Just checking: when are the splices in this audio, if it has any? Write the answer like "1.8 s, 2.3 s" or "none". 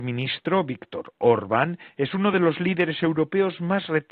none